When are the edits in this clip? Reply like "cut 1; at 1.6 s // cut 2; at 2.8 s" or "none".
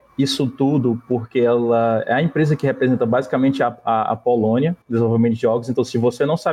cut 1; at 4.8 s